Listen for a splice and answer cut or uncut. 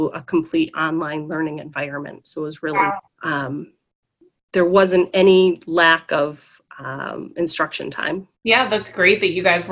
cut